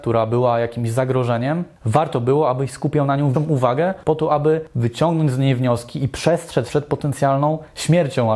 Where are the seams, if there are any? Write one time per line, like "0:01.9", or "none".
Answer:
0:03.3
0:06.7